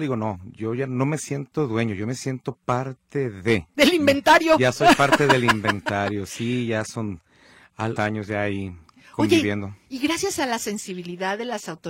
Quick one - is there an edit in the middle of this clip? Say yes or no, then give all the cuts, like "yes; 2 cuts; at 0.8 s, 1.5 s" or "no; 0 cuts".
yes; 1 cut; at 8.0 s